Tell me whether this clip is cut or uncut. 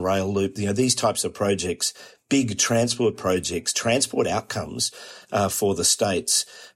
uncut